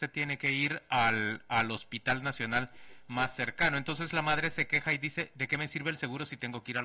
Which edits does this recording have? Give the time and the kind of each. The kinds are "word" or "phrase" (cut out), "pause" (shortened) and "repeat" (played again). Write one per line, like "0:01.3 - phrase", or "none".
none